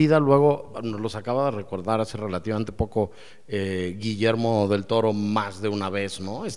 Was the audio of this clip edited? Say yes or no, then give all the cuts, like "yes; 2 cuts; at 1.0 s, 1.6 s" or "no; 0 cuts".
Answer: no; 0 cuts